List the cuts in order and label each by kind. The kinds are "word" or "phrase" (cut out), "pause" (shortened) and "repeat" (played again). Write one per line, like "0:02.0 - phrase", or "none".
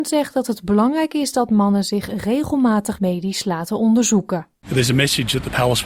0:04.6 - pause